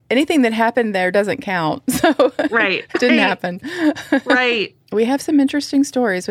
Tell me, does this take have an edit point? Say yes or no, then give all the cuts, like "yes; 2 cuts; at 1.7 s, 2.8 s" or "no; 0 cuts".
yes; 1 cut; at 2.9 s